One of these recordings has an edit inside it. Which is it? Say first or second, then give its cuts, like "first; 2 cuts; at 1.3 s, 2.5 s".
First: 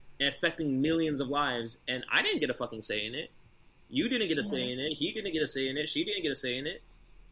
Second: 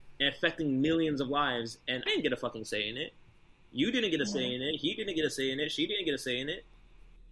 second; 1 cut; at 2.1 s